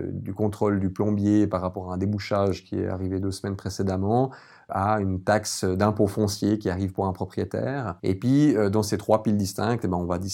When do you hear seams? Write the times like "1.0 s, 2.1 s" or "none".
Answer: none